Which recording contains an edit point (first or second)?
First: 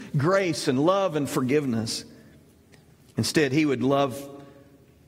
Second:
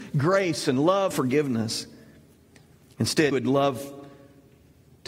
second